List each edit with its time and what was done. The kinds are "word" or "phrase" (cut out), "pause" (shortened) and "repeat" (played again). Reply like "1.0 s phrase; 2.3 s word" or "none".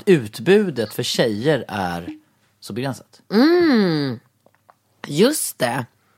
none